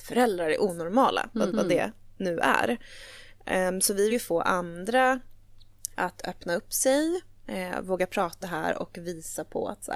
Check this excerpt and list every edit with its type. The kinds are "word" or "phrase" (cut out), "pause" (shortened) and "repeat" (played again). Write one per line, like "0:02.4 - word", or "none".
0:01.5 - repeat
0:04.1 - word
0:08.4 - word